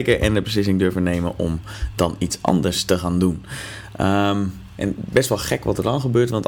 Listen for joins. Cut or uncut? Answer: uncut